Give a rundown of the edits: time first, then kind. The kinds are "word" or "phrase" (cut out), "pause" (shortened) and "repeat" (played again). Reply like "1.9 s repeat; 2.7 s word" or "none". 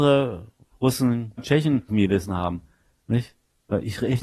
1.4 s word; 1.9 s word